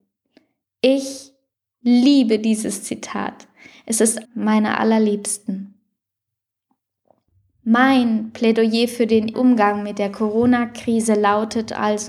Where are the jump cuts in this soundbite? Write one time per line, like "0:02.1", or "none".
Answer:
0:01.5
0:04.2
0:09.3